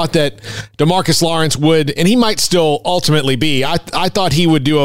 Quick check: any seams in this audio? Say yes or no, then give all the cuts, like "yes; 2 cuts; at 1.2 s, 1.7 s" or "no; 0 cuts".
no; 0 cuts